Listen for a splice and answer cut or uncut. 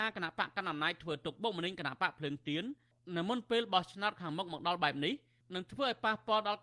uncut